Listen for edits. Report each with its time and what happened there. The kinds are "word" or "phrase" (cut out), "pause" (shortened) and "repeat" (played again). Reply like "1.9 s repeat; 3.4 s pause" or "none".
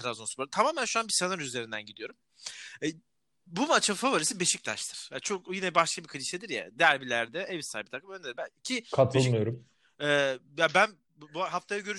none